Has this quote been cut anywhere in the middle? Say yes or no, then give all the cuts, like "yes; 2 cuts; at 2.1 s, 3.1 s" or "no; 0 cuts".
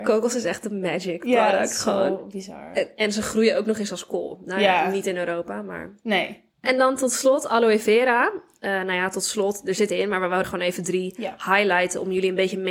yes; 3 cuts; at 6.5 s, 9.9 s, 10.4 s